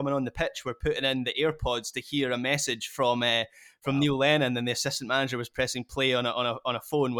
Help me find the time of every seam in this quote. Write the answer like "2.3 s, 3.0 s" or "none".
none